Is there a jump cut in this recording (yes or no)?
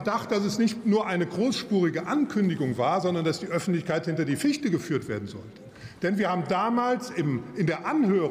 no